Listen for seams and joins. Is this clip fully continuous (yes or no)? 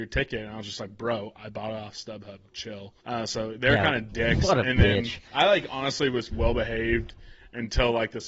no